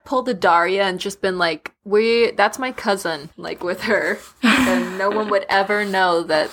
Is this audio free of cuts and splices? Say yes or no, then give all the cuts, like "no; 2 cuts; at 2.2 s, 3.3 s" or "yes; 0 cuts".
no; 1 cut; at 3.3 s